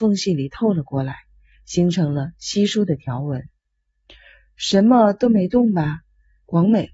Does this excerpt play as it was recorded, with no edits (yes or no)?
yes